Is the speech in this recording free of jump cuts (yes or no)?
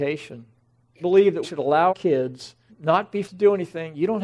no